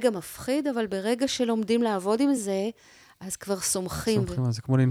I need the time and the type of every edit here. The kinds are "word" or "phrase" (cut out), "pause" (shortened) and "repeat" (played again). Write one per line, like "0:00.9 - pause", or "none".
none